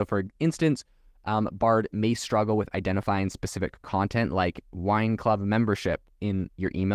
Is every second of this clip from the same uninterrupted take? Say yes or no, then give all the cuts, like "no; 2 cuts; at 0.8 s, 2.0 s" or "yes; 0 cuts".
yes; 0 cuts